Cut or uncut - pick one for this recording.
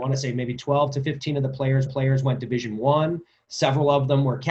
cut